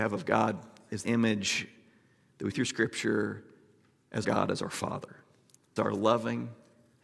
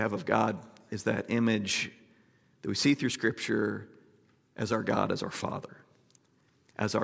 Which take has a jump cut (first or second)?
first